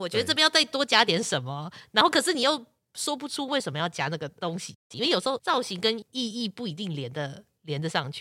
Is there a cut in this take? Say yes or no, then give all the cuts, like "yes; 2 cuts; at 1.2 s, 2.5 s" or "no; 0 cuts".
no; 0 cuts